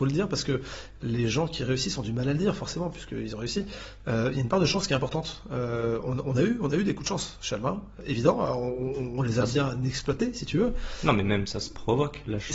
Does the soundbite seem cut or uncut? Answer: uncut